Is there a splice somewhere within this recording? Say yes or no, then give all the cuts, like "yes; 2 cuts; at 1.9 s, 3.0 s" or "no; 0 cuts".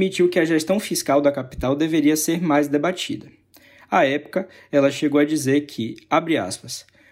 no; 0 cuts